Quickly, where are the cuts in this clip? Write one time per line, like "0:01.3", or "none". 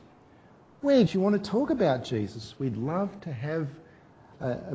0:01.1